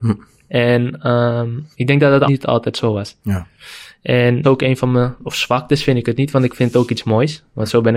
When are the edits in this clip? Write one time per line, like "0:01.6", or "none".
0:01.7
0:02.3
0:04.4